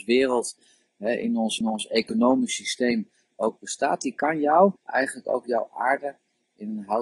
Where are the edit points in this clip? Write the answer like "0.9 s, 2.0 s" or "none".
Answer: 1.6 s, 4.8 s